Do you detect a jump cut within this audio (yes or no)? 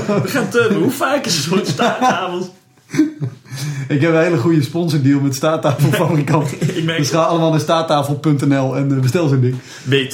no